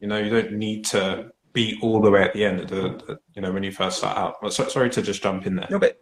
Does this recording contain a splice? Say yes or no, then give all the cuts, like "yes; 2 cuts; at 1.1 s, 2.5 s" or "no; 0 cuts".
yes; 1 cut; at 1.4 s